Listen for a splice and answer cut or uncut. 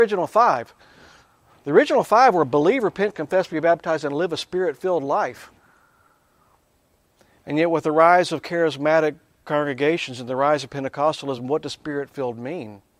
uncut